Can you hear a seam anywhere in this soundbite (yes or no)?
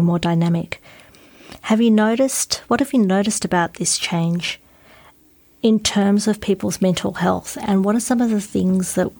no